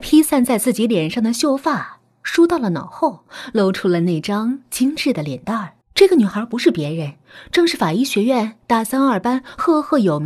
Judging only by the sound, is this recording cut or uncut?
cut